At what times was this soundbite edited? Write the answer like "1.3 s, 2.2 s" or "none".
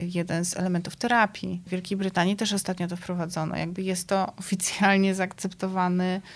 none